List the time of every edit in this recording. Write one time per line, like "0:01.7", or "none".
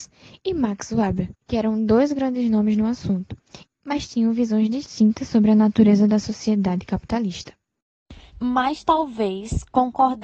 0:01.4
0:08.3